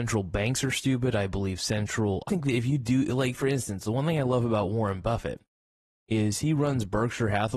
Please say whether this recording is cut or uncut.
cut